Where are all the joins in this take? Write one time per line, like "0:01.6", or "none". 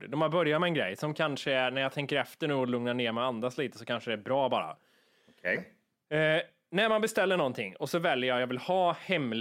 none